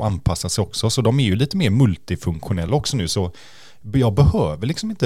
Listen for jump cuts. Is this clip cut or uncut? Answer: uncut